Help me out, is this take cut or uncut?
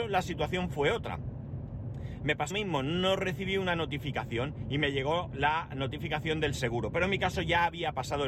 cut